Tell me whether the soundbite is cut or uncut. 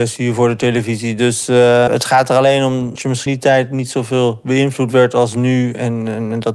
cut